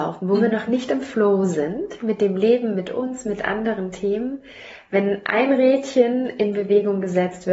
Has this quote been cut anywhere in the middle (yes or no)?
no